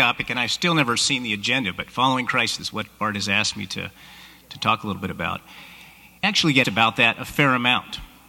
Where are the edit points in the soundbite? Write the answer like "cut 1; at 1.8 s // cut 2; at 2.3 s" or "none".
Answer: cut 1; at 2.6 s // cut 2; at 6.2 s // cut 3; at 6.6 s